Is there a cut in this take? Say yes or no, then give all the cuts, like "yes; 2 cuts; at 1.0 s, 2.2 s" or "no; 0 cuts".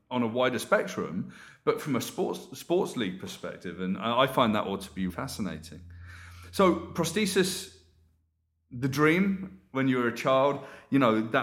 yes; 1 cut; at 5.1 s